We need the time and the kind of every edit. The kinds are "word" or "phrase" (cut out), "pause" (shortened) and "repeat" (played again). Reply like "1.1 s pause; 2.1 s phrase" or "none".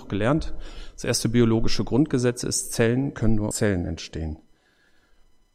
3.5 s word